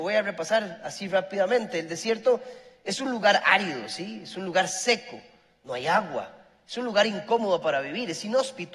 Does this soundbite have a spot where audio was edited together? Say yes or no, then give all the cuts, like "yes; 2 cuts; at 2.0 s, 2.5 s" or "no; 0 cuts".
no; 0 cuts